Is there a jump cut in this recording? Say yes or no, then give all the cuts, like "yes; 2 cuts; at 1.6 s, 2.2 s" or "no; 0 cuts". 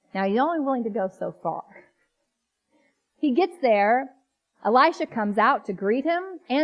no; 0 cuts